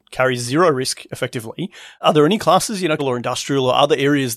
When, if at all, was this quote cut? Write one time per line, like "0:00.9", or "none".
0:03.0